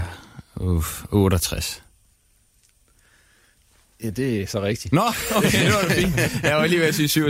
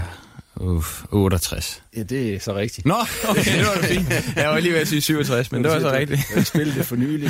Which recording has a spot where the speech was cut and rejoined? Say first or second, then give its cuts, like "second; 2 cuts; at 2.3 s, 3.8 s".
second; 1 cut; at 1.9 s